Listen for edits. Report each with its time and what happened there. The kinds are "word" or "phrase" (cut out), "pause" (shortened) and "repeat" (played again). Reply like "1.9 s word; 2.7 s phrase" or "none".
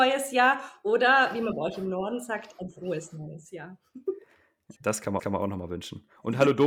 4.8 s pause; 5.2 s repeat